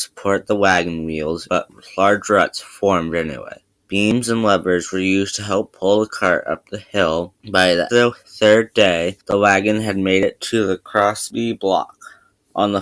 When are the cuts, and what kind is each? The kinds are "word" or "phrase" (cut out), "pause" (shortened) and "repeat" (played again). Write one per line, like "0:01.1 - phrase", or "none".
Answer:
0:07.9 - phrase